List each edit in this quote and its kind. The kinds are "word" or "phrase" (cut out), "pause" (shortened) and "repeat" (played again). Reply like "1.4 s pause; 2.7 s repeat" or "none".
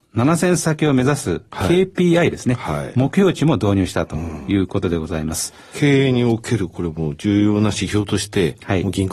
none